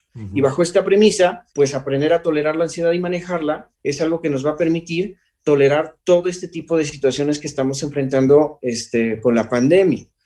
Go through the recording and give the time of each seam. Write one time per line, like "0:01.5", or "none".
0:01.5
0:03.7
0:06.0